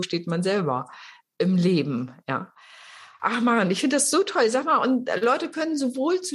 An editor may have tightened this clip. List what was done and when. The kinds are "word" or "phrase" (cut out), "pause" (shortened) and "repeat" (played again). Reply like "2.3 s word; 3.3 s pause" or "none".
none